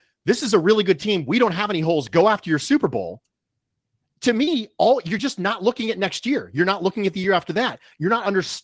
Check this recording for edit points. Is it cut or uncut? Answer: uncut